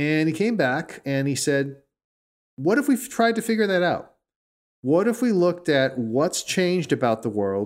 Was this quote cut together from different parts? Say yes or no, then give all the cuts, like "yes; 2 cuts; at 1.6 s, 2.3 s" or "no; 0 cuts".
no; 0 cuts